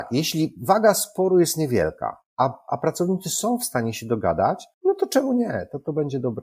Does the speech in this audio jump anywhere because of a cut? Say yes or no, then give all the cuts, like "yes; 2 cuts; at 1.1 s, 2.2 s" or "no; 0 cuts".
yes; 1 cut; at 4.7 s